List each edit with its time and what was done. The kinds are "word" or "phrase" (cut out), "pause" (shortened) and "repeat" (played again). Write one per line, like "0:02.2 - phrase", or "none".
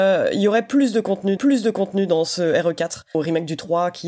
0:01.4 - repeat
0:03.1 - word